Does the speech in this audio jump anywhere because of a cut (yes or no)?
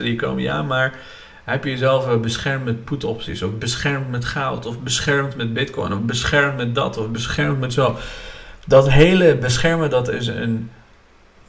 no